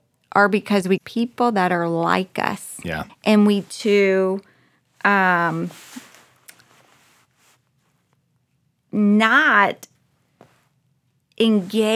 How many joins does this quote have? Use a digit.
3